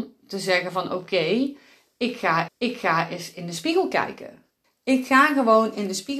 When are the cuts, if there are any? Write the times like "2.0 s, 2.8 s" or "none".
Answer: 2.5 s, 4.6 s

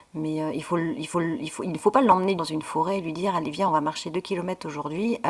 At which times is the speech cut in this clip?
1.1 s, 2.4 s

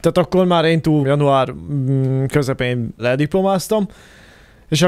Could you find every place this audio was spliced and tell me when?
1.0 s, 3.0 s

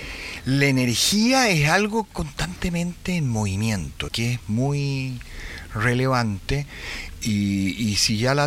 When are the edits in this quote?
2.1 s, 4.1 s

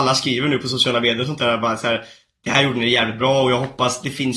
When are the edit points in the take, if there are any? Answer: none

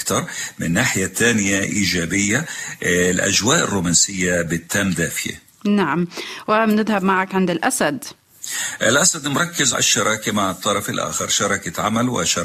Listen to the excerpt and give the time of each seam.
9.7 s

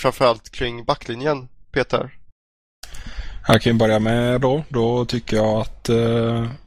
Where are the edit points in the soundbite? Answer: 4.4 s

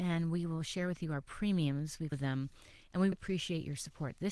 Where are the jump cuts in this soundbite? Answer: 2.1 s, 3.1 s

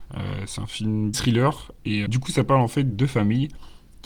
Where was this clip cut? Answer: 1.1 s, 2.1 s, 2.9 s

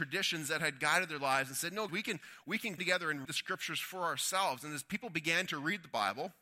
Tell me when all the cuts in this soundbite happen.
1.9 s, 2.8 s, 3.2 s

